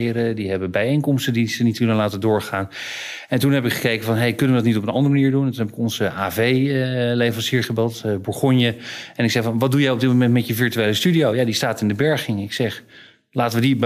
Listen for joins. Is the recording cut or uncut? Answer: uncut